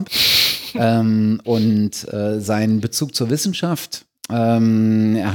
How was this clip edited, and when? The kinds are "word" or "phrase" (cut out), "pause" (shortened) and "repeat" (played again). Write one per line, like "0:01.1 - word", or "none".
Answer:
none